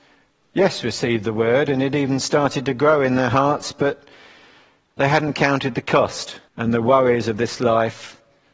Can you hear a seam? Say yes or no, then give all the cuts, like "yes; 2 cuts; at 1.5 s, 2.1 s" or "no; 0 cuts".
yes; 1 cut; at 6.5 s